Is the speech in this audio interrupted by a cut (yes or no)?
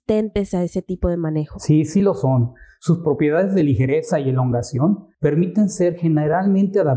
yes